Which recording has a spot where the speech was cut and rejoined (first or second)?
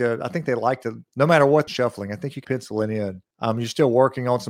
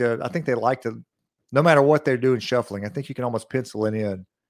first